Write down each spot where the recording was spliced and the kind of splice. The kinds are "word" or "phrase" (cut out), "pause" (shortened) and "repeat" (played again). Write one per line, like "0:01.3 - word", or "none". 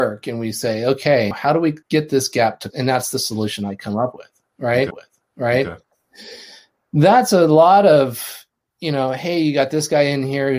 0:01.3 - word
0:01.8 - pause
0:02.7 - word
0:04.9 - repeat